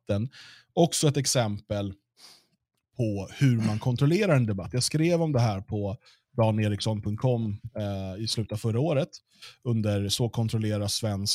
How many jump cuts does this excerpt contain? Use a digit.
0